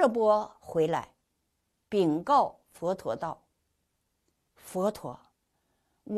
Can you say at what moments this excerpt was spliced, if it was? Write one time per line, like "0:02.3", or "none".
none